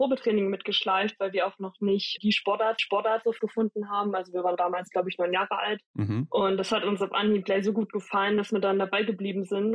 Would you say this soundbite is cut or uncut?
cut